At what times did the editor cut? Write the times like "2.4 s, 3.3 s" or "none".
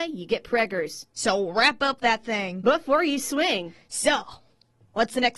none